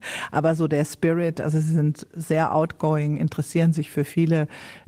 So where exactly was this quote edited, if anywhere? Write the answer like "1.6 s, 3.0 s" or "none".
none